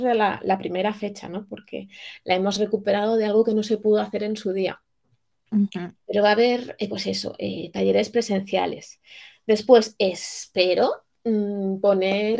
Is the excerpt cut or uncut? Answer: uncut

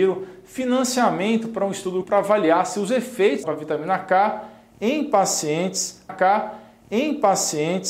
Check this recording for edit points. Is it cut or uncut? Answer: cut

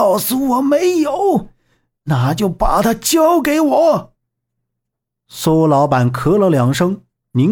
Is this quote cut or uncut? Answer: uncut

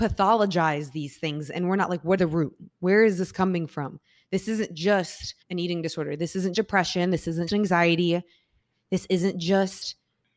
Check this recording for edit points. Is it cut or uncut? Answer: cut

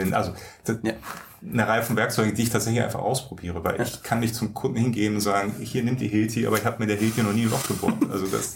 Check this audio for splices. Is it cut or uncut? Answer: uncut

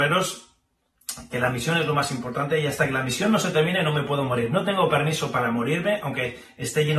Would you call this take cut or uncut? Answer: uncut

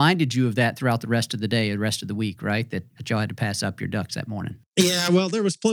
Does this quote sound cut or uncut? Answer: cut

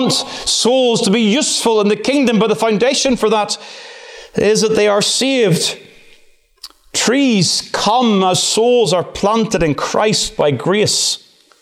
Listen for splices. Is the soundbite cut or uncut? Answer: uncut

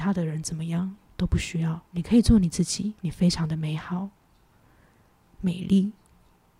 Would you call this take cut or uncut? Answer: cut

